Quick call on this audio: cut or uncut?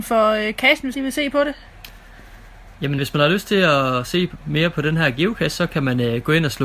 cut